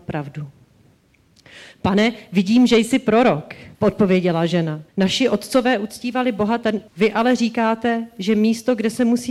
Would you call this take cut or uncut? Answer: cut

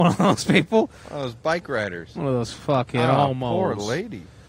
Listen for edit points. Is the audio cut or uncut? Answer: uncut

